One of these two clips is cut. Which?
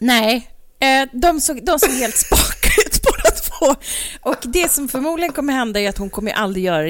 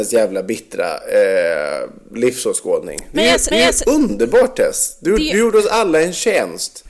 second; 1 cut; at 3.5 s

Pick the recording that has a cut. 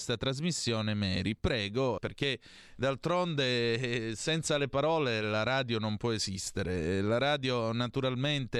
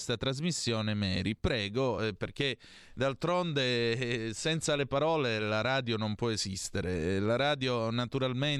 first; 1 cut; at 2.0 s

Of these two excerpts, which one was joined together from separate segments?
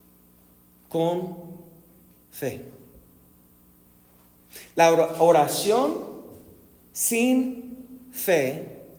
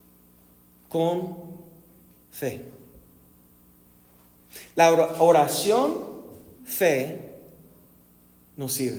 second; 1 cut; at 6.6 s

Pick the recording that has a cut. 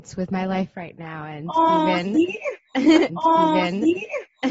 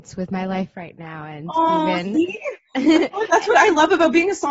first; 1 cut; at 3.1 s

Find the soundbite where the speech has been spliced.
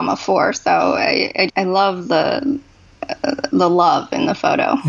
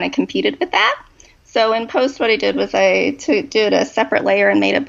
first; 1 cut; at 1.5 s

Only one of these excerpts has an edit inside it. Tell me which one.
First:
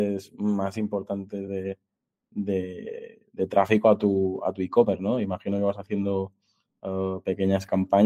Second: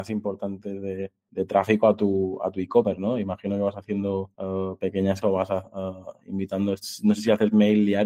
second; 3 cuts; at 1.3 s, 4.3 s, 5.2 s

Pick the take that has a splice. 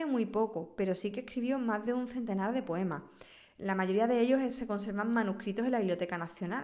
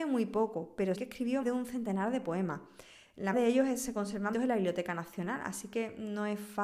second; 4 cuts; at 0.9 s, 1.4 s, 3.3 s, 4.3 s

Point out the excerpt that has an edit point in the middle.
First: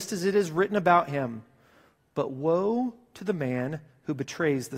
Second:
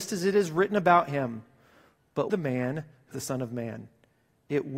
second; 2 cuts; at 2.3 s, 3.1 s

